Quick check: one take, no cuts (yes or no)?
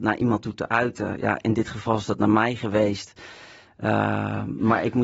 yes